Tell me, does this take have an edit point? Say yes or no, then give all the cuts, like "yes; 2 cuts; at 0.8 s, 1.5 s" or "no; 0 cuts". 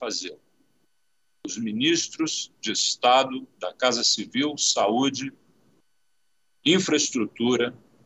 no; 0 cuts